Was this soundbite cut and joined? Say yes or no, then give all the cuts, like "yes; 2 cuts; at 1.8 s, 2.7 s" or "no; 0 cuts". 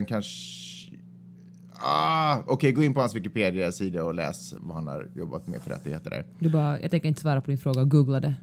yes; 1 cut; at 4.6 s